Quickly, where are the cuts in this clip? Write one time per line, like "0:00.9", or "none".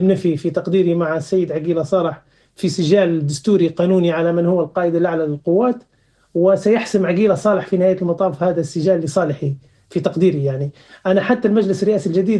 none